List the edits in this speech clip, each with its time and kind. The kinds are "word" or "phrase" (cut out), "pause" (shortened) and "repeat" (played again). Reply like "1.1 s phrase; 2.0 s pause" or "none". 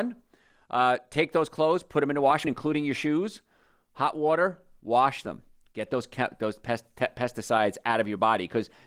2.4 s word